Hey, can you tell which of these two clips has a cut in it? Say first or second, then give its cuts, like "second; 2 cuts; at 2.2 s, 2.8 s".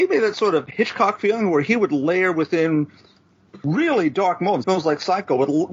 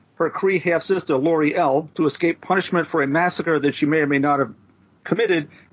first; 1 cut; at 4.6 s